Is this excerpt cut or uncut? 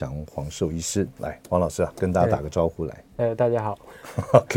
uncut